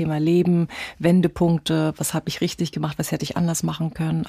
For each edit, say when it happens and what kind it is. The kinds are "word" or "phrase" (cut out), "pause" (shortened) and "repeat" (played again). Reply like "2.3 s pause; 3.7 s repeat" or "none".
none